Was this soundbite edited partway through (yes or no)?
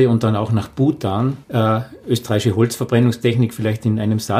yes